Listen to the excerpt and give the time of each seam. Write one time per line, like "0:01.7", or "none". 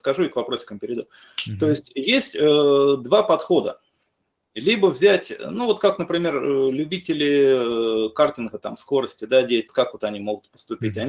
0:09.7